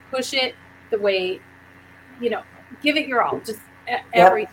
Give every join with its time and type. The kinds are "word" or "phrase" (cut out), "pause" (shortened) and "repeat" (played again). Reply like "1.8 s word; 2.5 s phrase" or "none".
none

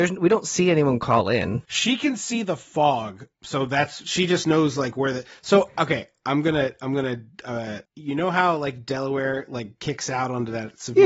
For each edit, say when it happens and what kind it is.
1.7 s pause; 3.3 s pause; 7.9 s pause

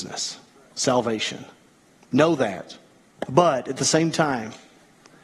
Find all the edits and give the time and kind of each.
none

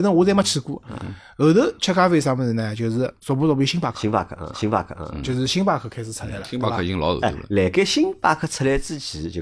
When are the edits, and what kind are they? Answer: 3.2 s pause; 4.5 s repeat

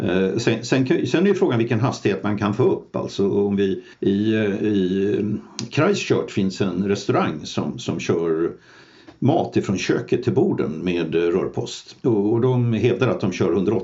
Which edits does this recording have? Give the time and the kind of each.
3.9 s pause; 12.0 s pause

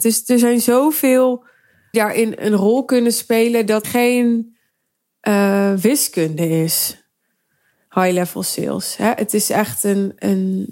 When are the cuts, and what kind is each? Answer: 1.9 s phrase; 3.8 s phrase

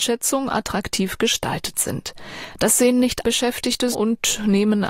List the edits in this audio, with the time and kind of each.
3.2 s word; 3.9 s word

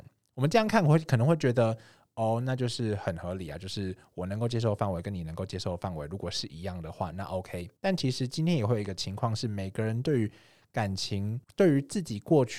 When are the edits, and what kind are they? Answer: 7.8 s pause; 11.4 s pause

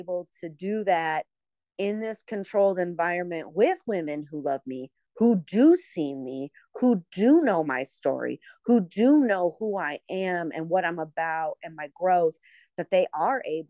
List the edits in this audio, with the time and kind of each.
none

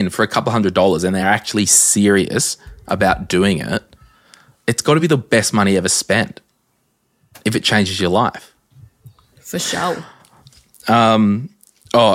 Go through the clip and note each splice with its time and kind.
none

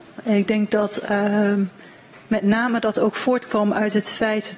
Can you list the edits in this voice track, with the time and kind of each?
none

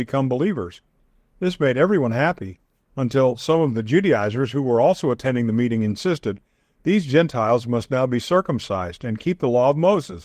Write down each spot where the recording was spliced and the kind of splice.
none

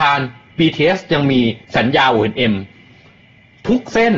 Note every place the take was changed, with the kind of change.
1.6 s pause

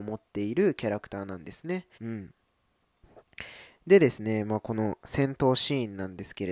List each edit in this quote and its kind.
1.9 s pause

